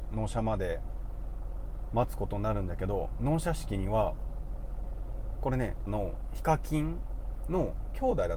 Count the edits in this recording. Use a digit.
1